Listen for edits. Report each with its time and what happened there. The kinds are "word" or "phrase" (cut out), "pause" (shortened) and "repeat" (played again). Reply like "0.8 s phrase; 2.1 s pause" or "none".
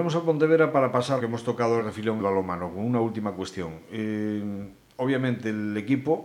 1.2 s word; 1.8 s word; 2.2 s word